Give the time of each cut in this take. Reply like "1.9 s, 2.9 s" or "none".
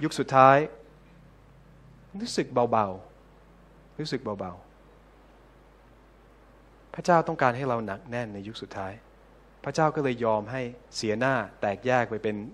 10.8 s